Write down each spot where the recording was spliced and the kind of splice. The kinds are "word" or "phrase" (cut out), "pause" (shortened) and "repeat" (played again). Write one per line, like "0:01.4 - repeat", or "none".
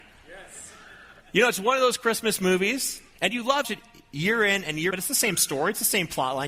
0:01.2 - pause
0:03.1 - pause
0:03.6 - phrase
0:04.9 - word